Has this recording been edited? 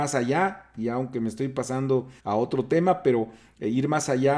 yes; 1 cut; at 2.2 s

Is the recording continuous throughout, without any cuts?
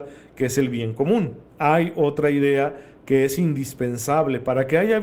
no; 1 cut; at 1.5 s

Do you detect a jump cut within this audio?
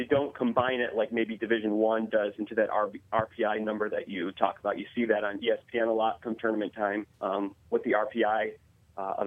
yes; 1 cut; at 7.1 s

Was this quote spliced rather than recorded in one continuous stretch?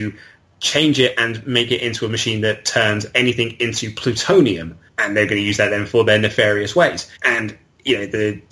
yes; 2 cuts; at 4.9 s, 7.2 s

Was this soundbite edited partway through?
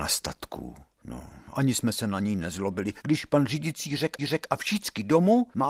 yes; 2 cuts; at 3.0 s, 4.2 s

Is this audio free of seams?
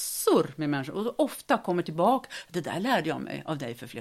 yes; 0 cuts

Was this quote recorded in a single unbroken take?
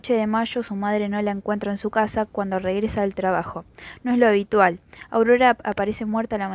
yes; 0 cuts

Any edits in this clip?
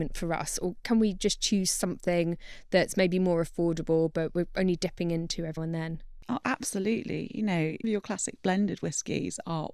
yes; 2 cuts; at 5.6 s, 7.8 s

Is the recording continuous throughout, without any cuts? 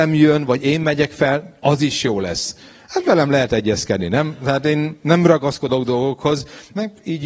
yes; 0 cuts

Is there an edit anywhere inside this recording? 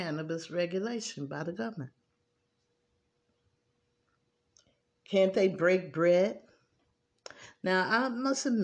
no; 0 cuts

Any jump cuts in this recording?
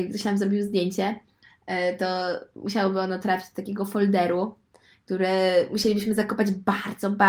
no; 0 cuts

